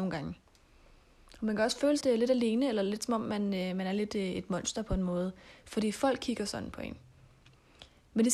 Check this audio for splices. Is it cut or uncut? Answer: cut